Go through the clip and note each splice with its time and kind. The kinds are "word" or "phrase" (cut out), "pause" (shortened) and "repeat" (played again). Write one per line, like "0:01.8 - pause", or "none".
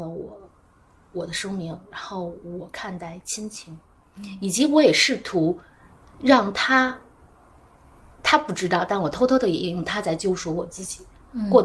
none